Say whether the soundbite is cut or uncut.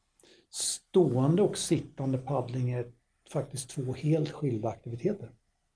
uncut